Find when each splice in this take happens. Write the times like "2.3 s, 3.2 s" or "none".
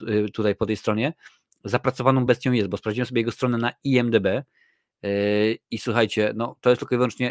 none